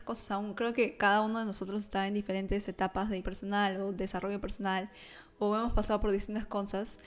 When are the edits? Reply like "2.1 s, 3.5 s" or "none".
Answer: 3.2 s